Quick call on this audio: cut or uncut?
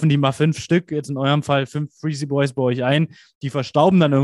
uncut